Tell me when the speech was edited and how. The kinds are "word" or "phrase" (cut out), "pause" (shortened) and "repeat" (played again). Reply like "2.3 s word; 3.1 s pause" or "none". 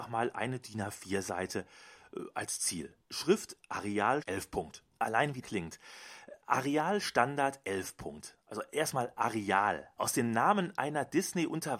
3.0 s pause; 4.2 s word; 5.4 s phrase; 10.0 s phrase